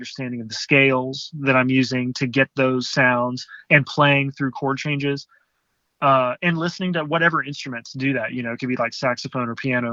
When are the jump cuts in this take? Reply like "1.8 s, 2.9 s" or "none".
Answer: none